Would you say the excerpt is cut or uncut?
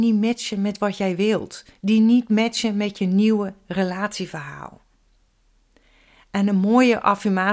uncut